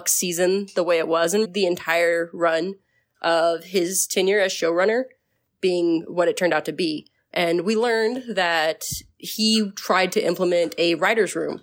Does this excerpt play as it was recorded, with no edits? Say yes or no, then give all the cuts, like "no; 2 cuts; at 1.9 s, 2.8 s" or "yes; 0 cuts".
no; 1 cut; at 1.4 s